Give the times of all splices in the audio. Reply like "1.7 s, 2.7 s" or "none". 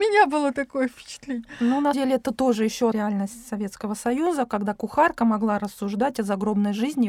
1.9 s, 2.9 s, 4.7 s